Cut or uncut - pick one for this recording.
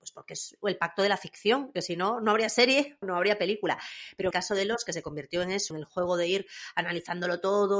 cut